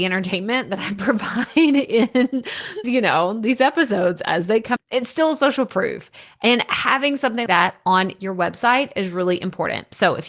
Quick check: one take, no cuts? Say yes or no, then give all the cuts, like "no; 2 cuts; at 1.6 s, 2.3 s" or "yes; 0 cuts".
no; 3 cuts; at 2.8 s, 4.8 s, 7.5 s